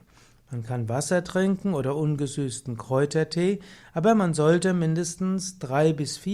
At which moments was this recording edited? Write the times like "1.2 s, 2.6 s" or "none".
none